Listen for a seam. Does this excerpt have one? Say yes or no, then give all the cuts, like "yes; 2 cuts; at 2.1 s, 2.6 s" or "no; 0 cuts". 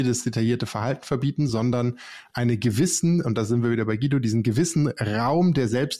no; 0 cuts